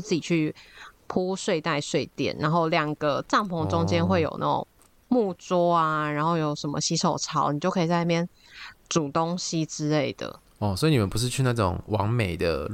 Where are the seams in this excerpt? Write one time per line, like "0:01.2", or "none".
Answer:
none